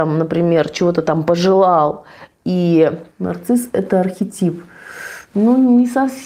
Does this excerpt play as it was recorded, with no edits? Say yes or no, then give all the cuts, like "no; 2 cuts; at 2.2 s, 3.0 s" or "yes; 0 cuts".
no; 1 cut; at 3.1 s